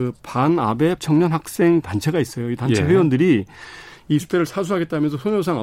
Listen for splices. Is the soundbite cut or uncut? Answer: cut